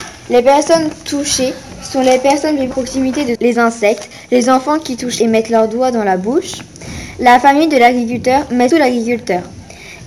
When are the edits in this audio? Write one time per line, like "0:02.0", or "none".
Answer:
0:02.7
0:03.4
0:05.2
0:08.7